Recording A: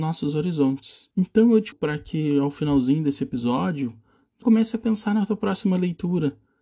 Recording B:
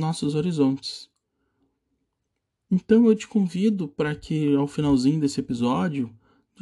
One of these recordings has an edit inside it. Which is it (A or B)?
A